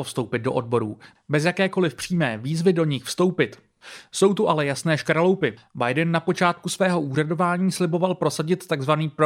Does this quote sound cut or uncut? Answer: uncut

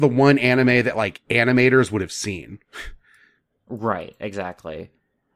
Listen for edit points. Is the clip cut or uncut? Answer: uncut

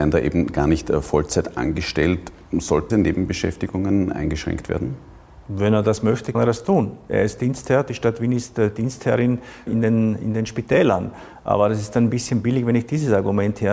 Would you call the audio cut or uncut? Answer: cut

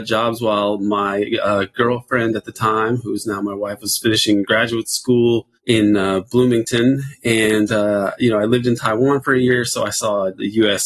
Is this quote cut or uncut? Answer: cut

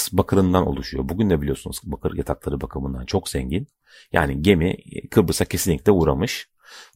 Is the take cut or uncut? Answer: cut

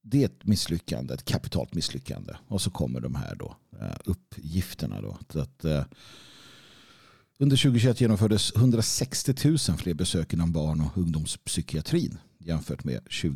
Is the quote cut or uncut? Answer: uncut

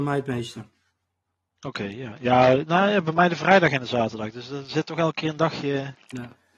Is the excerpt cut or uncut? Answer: uncut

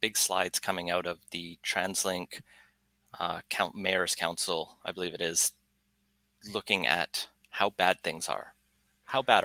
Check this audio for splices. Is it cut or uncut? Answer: uncut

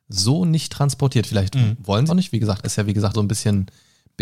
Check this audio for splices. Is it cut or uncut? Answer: cut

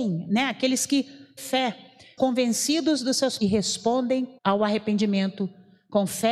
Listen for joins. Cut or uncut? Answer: cut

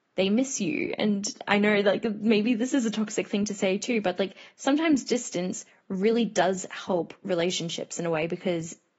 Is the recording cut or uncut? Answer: uncut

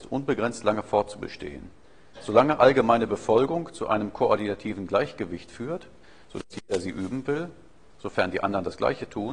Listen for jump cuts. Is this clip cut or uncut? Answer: uncut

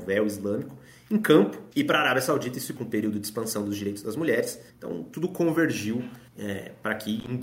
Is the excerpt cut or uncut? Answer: cut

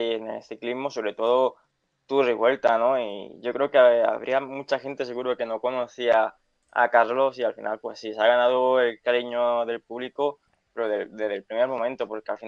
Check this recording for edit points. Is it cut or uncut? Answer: uncut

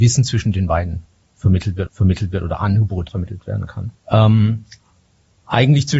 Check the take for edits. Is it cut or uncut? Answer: cut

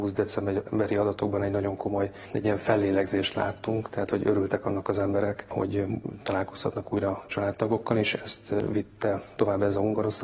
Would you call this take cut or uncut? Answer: uncut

